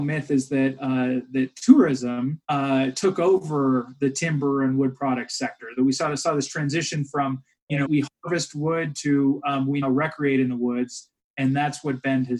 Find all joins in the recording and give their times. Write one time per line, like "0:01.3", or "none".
0:02.4
0:07.8
0:09.8